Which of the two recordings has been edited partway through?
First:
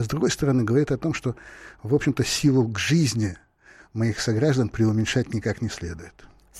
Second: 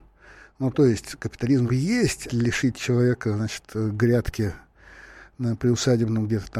second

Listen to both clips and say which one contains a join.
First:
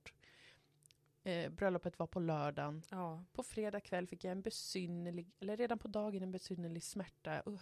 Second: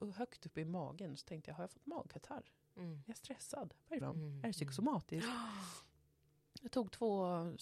second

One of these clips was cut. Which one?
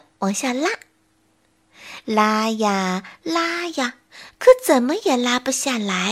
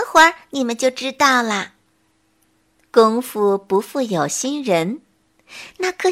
second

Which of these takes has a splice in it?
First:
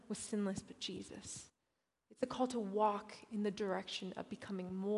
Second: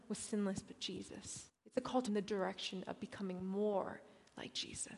second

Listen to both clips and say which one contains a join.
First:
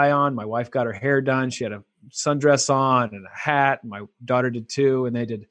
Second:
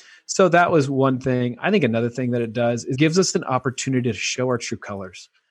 second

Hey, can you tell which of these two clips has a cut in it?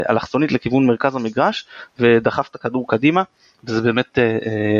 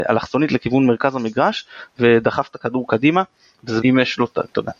second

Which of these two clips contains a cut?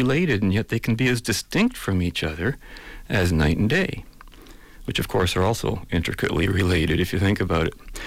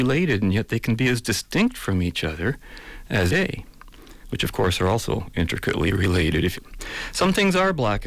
second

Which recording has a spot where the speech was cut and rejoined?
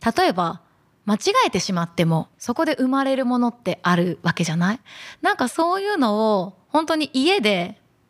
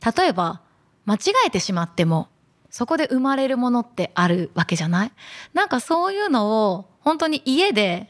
first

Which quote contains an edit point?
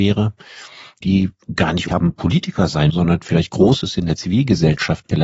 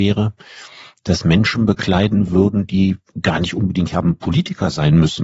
first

